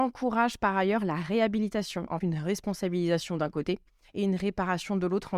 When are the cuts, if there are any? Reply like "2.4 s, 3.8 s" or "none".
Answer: 2.2 s